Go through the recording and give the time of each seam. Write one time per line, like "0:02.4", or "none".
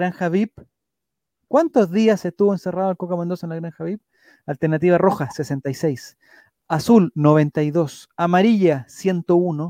none